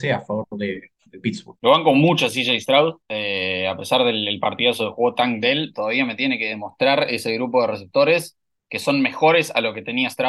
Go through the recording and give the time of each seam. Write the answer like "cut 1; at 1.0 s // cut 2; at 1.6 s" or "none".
cut 1; at 3.0 s